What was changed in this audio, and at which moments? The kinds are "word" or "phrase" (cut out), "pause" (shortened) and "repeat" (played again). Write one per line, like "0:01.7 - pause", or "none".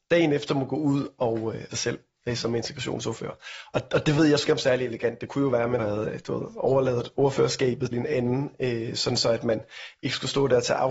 0:01.7 - phrase
0:04.5 - word
0:05.8 - word
0:07.9 - word